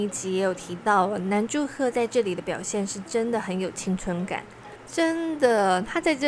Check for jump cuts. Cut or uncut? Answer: uncut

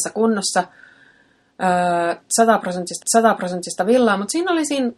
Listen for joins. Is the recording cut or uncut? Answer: cut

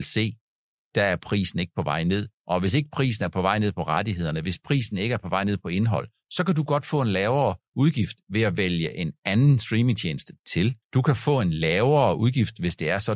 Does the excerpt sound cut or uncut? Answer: cut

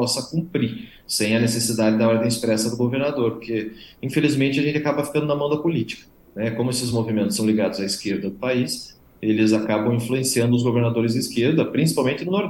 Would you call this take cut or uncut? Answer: uncut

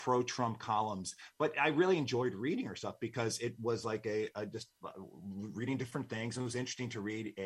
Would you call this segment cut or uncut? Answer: uncut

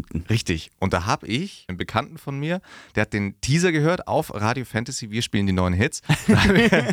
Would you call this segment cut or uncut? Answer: cut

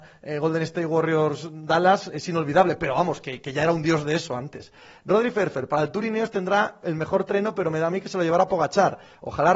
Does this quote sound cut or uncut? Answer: uncut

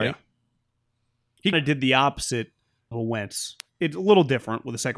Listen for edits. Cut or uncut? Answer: cut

